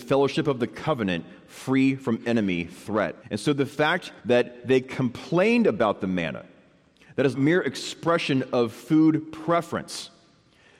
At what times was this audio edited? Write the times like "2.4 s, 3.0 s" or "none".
3.2 s, 4.2 s, 7.3 s